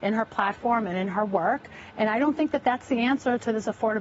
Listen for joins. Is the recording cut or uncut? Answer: uncut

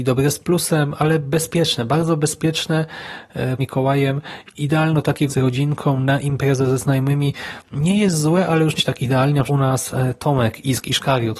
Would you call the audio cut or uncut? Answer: cut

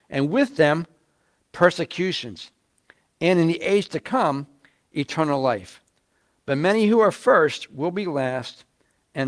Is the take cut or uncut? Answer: uncut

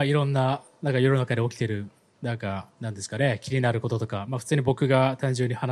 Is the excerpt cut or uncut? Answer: uncut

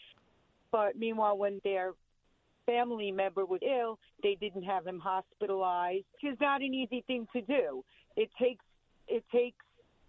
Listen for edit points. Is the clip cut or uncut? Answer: cut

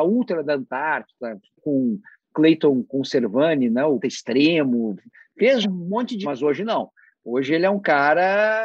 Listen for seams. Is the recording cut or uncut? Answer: cut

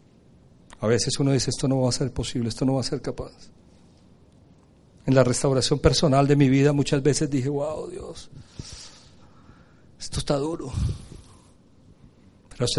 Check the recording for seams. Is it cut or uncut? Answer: uncut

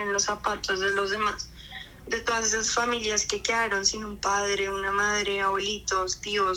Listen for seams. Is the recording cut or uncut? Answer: uncut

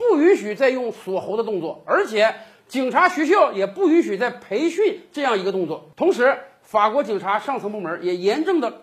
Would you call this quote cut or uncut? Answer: uncut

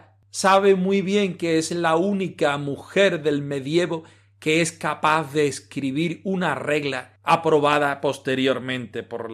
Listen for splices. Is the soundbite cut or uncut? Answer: uncut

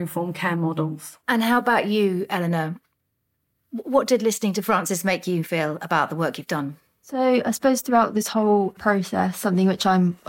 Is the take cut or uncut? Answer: uncut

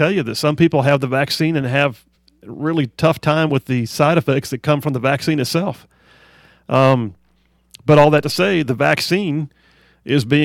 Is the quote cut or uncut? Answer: uncut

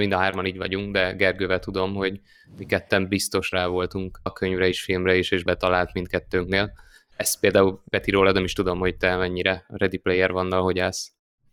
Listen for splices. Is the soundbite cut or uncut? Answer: cut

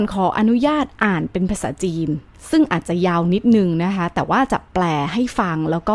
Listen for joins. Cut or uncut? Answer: uncut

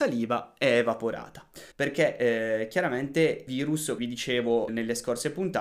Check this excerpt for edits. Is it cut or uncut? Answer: cut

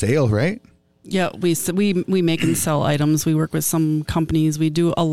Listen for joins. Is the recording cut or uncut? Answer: uncut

